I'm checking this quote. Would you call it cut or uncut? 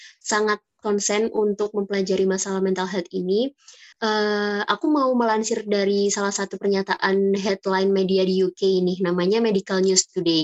cut